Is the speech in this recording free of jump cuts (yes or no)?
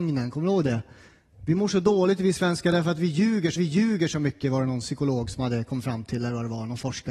no